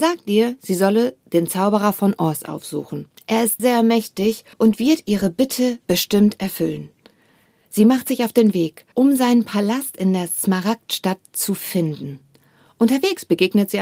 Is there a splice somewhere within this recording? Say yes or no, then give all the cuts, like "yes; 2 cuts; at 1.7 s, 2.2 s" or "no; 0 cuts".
yes; 4 cuts; at 3.2 s, 3.6 s, 4.5 s, 8.9 s